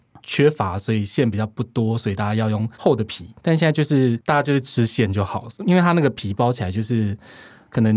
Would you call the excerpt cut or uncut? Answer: cut